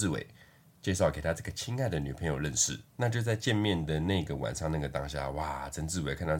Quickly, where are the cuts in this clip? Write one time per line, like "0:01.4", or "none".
0:02.9